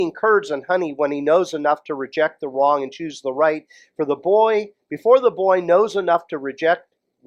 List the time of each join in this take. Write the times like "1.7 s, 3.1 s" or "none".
none